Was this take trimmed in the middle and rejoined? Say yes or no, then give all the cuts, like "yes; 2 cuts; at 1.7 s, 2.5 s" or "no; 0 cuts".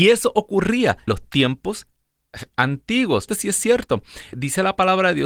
yes; 3 cuts; at 1.1 s, 3.3 s, 4.3 s